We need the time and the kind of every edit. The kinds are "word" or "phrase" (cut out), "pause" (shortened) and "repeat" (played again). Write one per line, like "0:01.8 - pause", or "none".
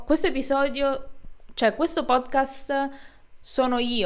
none

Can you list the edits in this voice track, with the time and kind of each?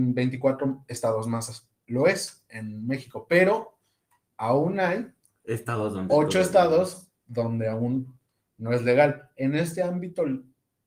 none

